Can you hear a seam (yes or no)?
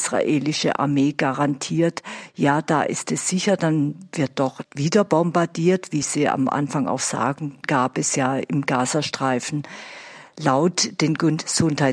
no